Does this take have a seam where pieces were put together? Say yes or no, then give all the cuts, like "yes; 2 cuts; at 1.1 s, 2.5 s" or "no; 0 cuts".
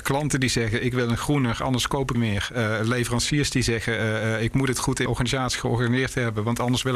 yes; 2 cuts; at 2.1 s, 5.1 s